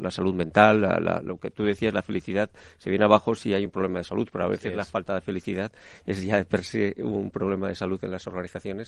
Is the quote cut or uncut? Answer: uncut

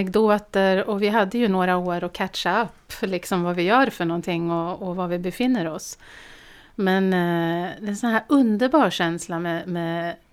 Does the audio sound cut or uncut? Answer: uncut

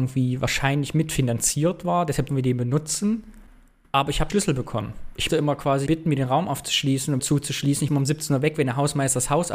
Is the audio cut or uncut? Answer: cut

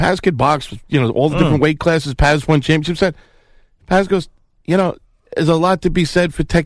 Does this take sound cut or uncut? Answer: uncut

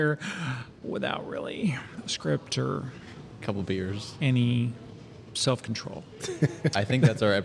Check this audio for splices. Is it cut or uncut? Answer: uncut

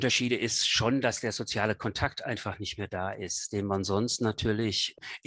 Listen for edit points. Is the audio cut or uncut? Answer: uncut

